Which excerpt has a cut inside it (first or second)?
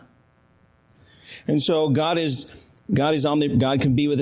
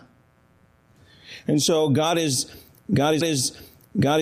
second